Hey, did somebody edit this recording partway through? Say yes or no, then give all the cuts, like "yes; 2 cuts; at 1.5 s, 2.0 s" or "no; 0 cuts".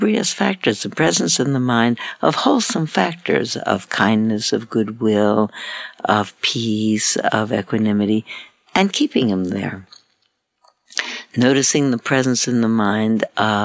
no; 0 cuts